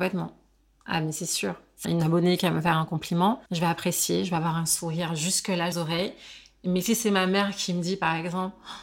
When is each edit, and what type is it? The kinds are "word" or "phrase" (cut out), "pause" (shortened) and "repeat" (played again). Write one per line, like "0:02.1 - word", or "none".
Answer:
0:01.8 - phrase
0:03.5 - pause
0:05.7 - word

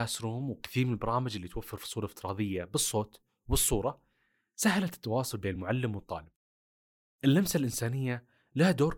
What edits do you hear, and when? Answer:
none

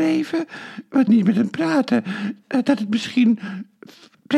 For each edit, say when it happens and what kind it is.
0:01.1 - phrase

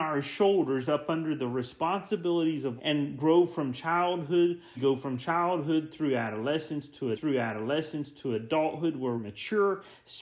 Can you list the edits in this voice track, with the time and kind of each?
0:02.8 - word
0:04.7 - phrase
0:07.1 - repeat
0:09.1 - word

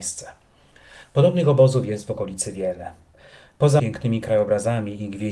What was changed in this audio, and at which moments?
0:03.8 - word

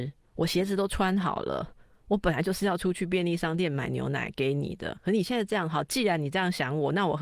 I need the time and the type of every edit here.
none

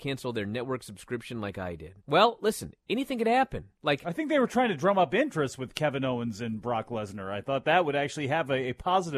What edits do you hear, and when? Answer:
0:02.0 - pause
0:03.7 - pause

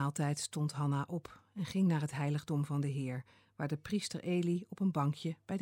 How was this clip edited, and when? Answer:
none

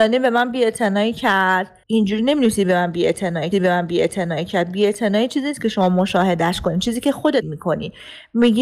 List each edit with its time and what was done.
0:01.8 - pause
0:03.5 - repeat
0:07.4 - word

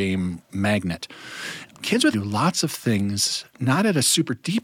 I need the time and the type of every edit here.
0:02.1 - word

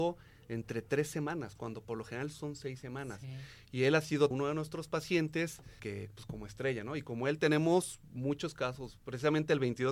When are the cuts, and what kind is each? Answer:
0:04.3 - word
0:05.8 - word

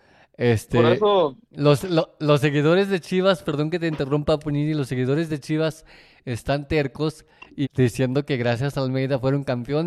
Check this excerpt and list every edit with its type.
0:07.6 - word

